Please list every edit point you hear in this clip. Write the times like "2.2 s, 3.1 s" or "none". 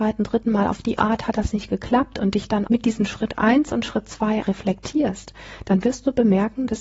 2.7 s, 4.4 s